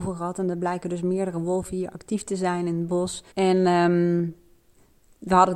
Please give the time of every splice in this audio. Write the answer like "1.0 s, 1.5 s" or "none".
3.3 s